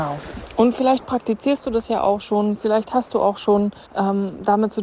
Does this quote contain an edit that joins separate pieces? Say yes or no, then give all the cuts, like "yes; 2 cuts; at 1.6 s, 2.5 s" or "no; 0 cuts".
yes; 1 cut; at 3.9 s